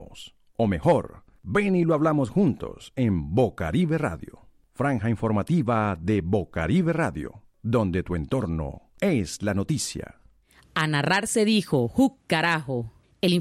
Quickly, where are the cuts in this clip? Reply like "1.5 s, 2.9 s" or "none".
none